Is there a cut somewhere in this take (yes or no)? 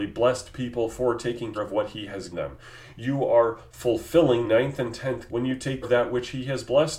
yes